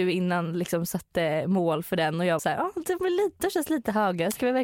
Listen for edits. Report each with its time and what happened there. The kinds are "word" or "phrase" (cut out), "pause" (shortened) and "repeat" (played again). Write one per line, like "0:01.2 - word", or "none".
0:02.4 - word